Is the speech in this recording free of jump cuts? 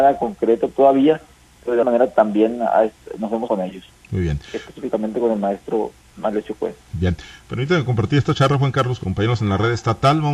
no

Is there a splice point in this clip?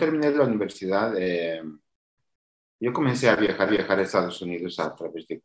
yes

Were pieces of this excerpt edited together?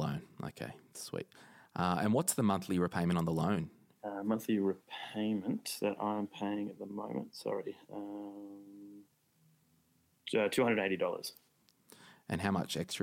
no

